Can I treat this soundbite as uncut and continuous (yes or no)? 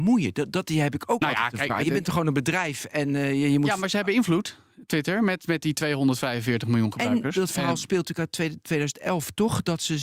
yes